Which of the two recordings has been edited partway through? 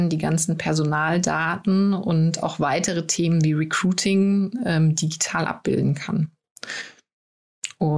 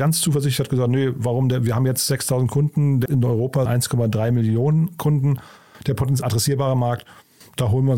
second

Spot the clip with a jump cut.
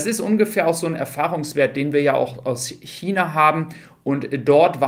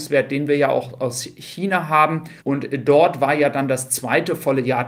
second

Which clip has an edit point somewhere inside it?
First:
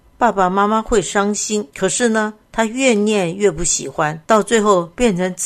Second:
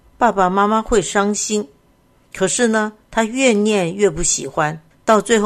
first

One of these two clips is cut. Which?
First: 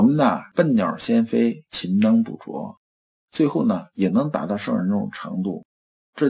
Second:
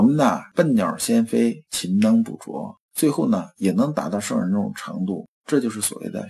second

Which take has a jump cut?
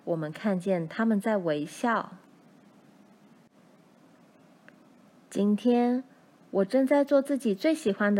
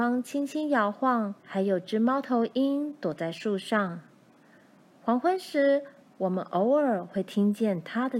second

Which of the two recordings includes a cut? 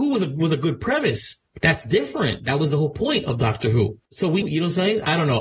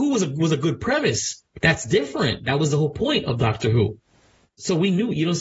first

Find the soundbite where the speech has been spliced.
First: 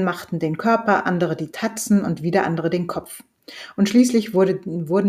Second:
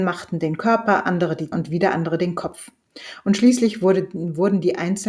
second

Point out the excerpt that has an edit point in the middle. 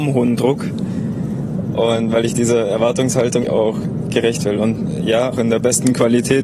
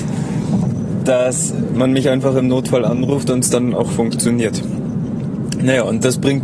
first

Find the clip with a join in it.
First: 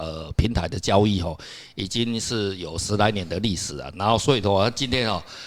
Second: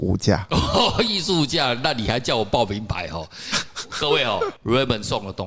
second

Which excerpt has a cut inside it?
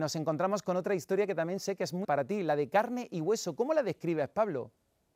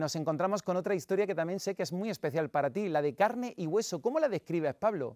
first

